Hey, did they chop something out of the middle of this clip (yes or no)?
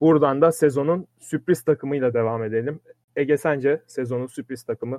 no